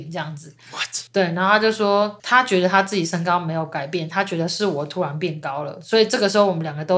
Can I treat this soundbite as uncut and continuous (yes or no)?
no